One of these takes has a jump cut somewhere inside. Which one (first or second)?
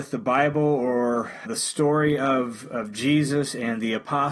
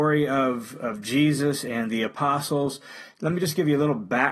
first